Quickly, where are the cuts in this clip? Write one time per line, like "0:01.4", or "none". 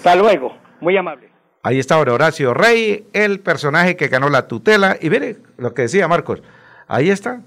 none